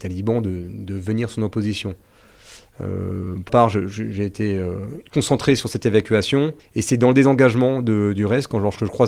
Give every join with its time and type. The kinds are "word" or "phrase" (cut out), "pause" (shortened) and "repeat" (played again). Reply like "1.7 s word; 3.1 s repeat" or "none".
3.5 s word; 5.1 s pause; 6.6 s pause